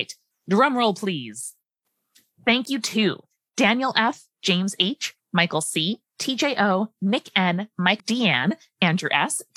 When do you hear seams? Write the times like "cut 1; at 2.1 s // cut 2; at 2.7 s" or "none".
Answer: cut 1; at 8.0 s